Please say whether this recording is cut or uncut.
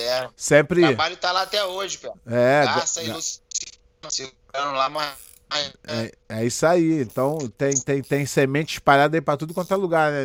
cut